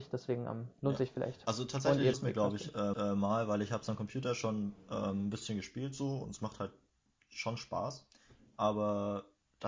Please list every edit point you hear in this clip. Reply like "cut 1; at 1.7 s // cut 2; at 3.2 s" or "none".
cut 1; at 2.1 s // cut 2; at 2.9 s

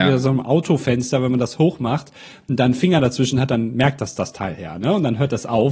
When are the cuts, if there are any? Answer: none

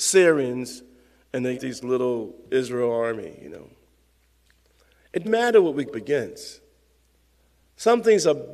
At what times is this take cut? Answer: cut 1; at 1.5 s // cut 2; at 5.2 s // cut 3; at 5.9 s

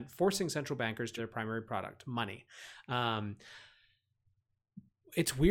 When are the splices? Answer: cut 1; at 1.2 s

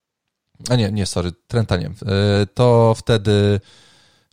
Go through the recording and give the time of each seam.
none

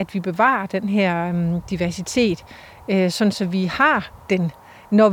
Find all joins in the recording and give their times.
none

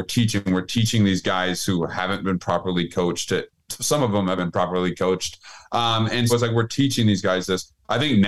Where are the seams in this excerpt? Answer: cut 1; at 4.4 s // cut 2; at 6.3 s

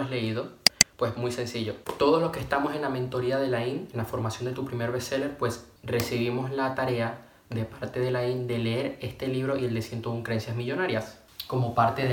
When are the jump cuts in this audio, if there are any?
cut 1; at 5.8 s

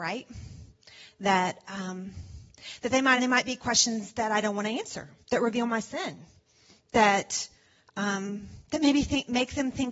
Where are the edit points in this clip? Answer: cut 1; at 3.2 s // cut 2; at 5.2 s

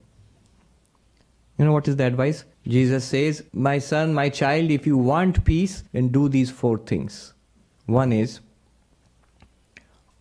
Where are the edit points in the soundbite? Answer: cut 1; at 2.5 s // cut 2; at 3.5 s // cut 3; at 5.9 s // cut 4; at 7.6 s

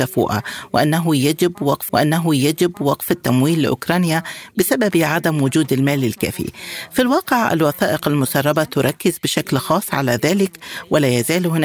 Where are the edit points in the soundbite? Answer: cut 1; at 1.9 s

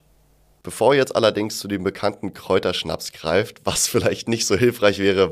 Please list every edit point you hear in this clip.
none

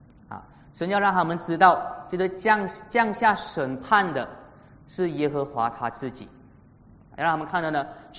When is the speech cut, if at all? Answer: none

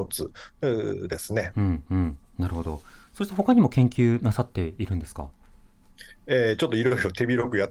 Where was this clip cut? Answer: none

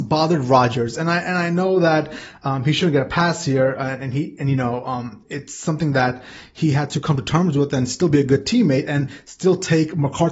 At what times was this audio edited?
none

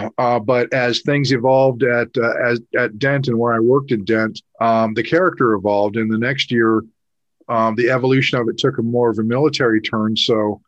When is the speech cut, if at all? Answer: cut 1; at 4.5 s

